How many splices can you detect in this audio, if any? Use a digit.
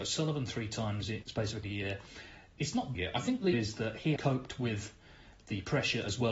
5